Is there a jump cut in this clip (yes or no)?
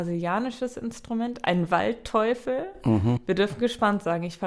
no